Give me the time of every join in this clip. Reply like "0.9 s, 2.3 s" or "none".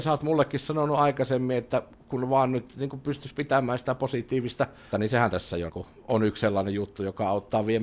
4.9 s, 5.7 s